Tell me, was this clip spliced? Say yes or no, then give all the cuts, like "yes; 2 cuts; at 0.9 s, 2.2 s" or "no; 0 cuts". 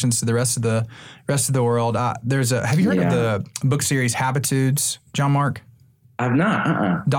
no; 0 cuts